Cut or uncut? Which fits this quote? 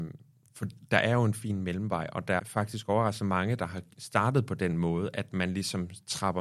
cut